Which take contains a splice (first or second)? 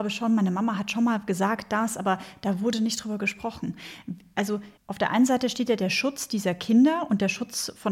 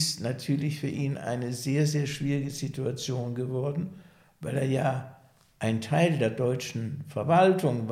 first